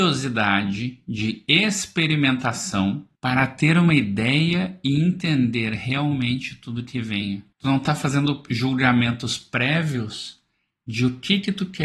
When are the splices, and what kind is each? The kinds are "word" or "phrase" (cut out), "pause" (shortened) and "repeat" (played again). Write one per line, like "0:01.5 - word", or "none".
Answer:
0:03.2 - pause
0:07.5 - pause